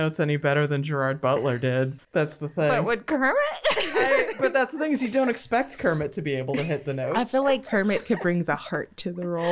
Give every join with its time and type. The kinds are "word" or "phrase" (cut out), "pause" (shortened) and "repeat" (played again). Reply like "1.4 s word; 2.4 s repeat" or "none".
2.0 s pause